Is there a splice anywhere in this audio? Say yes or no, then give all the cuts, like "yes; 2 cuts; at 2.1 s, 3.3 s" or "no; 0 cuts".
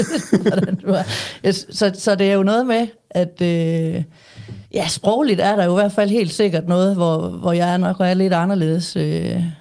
yes; 1 cut; at 4.7 s